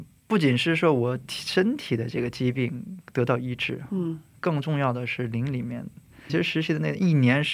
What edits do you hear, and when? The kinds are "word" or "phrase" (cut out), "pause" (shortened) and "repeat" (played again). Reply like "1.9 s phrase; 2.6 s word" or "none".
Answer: 6.3 s word